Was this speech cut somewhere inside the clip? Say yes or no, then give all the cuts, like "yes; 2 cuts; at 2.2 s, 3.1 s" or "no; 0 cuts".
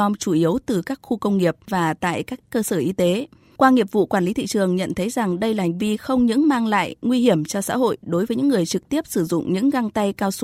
no; 0 cuts